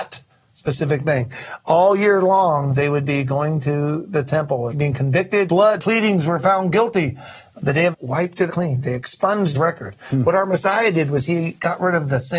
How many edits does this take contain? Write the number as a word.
six